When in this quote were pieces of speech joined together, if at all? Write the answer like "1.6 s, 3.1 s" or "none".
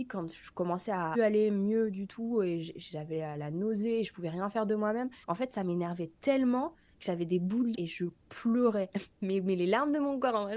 1.1 s, 5.2 s, 7.7 s, 8.2 s